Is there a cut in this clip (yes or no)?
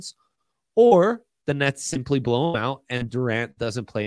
no